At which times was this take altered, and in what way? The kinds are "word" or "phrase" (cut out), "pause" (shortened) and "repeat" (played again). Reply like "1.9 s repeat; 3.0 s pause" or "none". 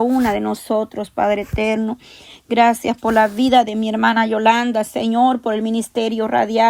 none